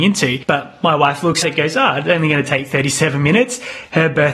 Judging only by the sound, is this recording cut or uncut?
cut